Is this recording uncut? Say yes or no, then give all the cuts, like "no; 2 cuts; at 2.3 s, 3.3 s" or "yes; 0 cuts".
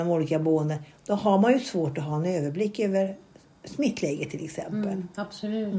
yes; 0 cuts